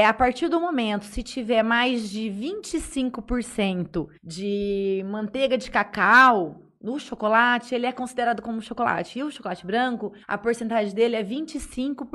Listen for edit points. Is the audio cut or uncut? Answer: cut